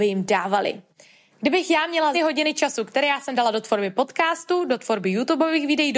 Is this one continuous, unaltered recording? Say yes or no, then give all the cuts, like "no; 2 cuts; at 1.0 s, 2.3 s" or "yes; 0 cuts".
no; 1 cut; at 2.1 s